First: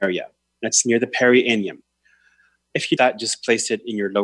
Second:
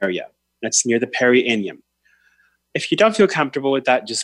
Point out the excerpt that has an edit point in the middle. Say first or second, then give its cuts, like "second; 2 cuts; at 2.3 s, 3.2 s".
first; 1 cut; at 3.0 s